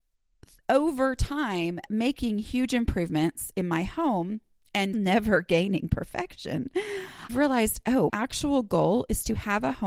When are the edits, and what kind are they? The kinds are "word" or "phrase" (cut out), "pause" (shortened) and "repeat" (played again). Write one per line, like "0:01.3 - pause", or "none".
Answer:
0:01.9 - word
0:04.9 - word
0:07.3 - word
0:08.1 - word